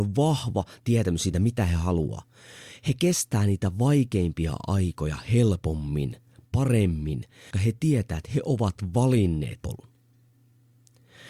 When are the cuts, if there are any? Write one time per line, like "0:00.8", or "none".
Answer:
0:07.5
0:09.6